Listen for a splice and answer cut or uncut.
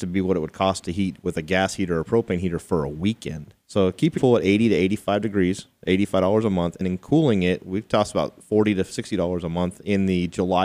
cut